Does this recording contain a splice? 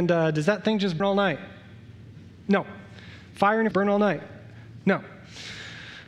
yes; 2 cuts; at 1.0 s, 3.7 s

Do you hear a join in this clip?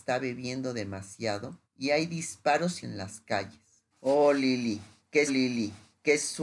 yes; 4 cuts; at 1.6 s, 2.8 s, 3.9 s, 5.3 s

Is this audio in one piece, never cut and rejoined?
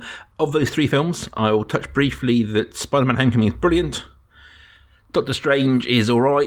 yes; 0 cuts

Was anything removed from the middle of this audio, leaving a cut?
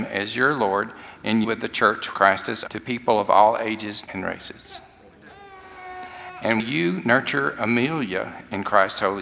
yes; 5 cuts; at 1.4 s, 2.1 s, 2.7 s, 4.1 s, 6.6 s

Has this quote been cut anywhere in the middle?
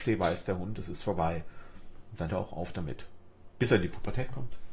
yes; 1 cut; at 2.3 s

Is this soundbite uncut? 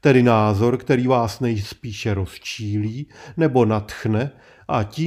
yes; 0 cuts

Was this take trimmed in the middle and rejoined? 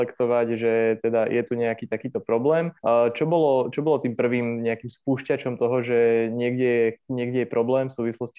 yes; 1 cut; at 2.8 s

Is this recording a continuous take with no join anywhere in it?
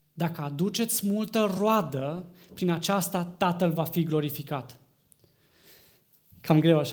yes; 0 cuts

